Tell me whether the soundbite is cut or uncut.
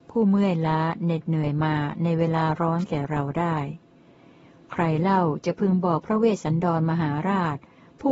uncut